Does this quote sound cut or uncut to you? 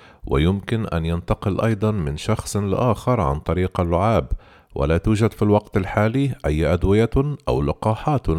uncut